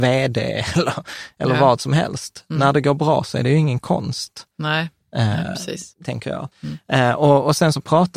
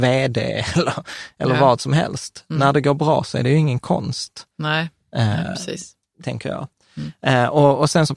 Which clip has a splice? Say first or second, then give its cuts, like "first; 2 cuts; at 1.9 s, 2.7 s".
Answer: first; 2 cuts; at 5.9 s, 6.5 s